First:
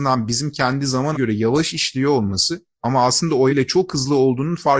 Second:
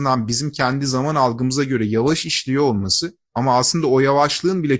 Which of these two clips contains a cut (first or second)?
first